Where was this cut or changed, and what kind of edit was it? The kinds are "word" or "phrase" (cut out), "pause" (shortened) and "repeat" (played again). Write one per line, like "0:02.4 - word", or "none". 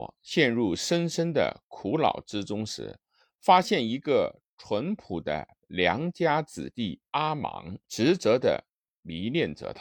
0:07.8 - pause